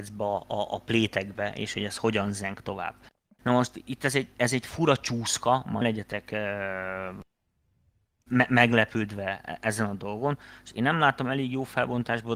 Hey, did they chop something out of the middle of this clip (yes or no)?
yes